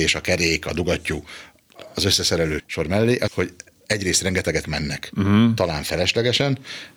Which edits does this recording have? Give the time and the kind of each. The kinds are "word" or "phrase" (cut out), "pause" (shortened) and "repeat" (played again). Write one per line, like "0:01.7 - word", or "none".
0:02.6 - word
0:03.3 - phrase
0:04.6 - phrase